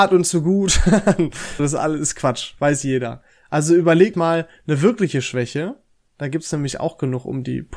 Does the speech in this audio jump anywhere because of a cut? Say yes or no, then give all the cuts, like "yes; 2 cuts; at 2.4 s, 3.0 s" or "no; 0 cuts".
yes; 2 cuts; at 1.6 s, 4.1 s